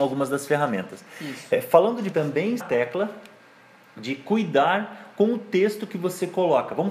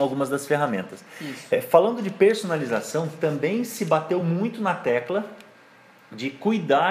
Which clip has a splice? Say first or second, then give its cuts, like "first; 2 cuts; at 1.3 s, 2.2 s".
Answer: first; 2 cuts; at 2.1 s, 2.6 s